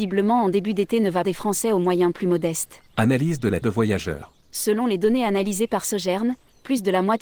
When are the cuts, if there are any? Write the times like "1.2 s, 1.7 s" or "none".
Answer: 1.2 s, 2.9 s, 3.6 s, 4.4 s